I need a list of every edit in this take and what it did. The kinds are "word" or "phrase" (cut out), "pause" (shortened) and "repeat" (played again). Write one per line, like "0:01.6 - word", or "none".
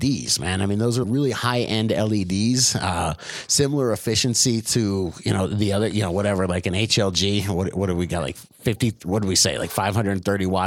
0:01.0 - word
0:08.5 - pause